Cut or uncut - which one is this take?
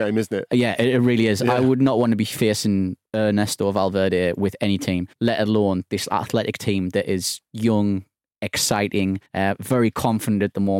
cut